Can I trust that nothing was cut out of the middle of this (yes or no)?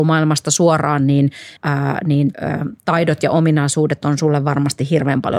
no